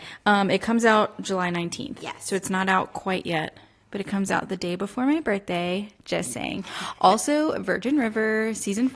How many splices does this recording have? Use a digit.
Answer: 0